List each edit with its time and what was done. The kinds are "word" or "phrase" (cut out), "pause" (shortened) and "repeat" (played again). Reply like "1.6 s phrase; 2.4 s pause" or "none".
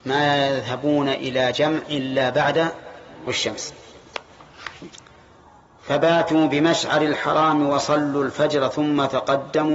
3.3 s word